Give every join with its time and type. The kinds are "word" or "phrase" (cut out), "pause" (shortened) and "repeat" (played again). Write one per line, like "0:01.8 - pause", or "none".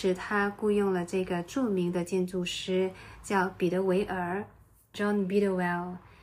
0:04.9 - word